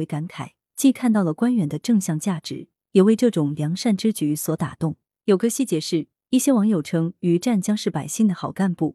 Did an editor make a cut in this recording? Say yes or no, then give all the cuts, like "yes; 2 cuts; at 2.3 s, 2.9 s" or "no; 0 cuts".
no; 0 cuts